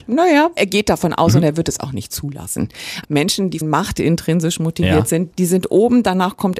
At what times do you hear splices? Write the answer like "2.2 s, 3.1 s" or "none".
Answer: 3.6 s